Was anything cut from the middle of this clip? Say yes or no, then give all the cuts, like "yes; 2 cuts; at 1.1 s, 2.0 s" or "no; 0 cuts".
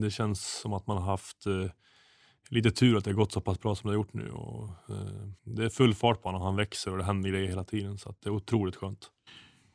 yes; 1 cut; at 5.4 s